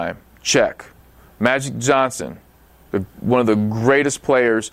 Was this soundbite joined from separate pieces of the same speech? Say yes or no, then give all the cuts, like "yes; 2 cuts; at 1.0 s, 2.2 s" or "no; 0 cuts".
no; 0 cuts